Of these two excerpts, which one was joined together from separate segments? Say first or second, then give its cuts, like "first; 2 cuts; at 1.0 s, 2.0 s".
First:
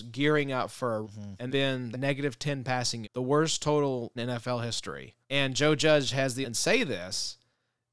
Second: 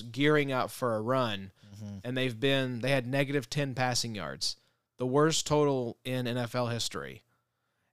first; 7 cuts; at 1.0 s, 1.5 s, 1.9 s, 3.0 s, 4.2 s, 5.2 s, 6.4 s